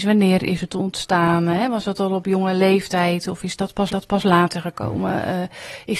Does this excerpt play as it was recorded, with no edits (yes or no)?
no